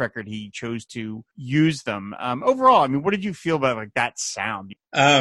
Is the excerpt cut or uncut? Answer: cut